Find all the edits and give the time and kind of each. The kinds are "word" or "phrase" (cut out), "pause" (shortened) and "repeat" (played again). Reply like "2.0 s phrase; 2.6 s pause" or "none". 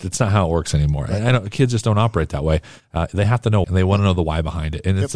3.6 s word